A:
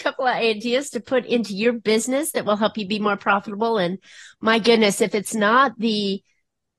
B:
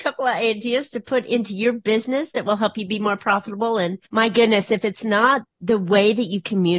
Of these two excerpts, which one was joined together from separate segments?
B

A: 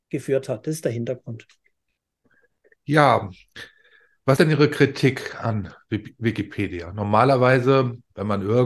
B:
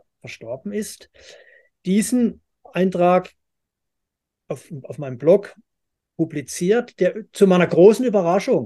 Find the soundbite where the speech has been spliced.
A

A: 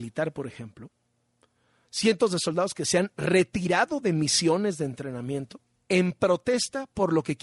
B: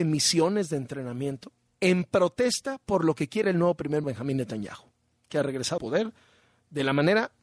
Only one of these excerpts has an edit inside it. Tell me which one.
B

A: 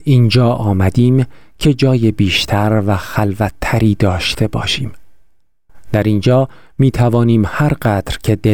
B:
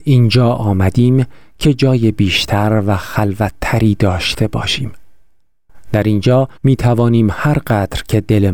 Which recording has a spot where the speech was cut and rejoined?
B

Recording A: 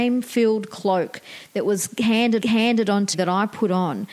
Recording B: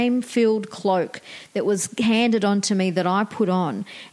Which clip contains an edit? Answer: A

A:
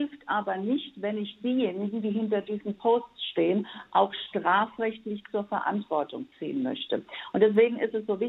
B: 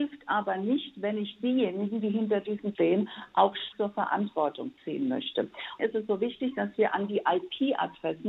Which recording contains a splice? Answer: B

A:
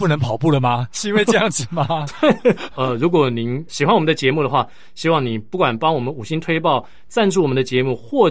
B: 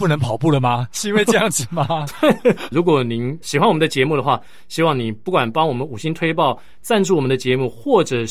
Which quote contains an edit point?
B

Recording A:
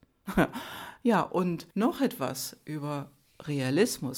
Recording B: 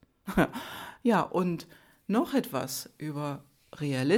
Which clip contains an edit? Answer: A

